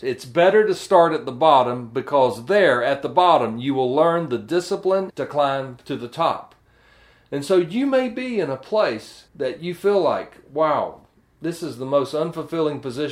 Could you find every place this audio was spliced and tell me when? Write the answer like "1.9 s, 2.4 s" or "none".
5.1 s, 9.3 s